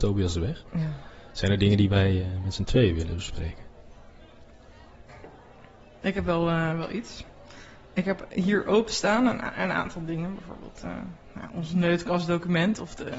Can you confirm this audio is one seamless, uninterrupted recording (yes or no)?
yes